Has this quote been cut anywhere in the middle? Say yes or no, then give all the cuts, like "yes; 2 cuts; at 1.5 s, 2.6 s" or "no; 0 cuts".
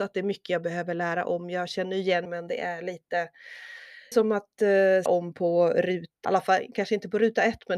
yes; 4 cuts; at 2.3 s, 4.1 s, 5.1 s, 6.2 s